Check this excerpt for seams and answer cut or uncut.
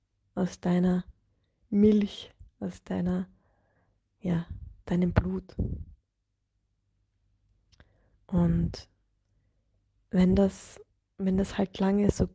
cut